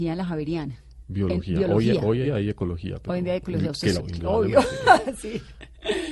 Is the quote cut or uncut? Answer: cut